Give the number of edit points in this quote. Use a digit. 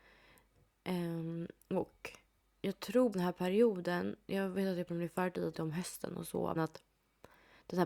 5